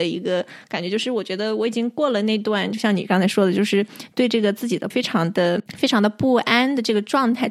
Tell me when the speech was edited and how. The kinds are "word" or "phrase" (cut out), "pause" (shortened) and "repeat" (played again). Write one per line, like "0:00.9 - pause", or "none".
0:04.9 - word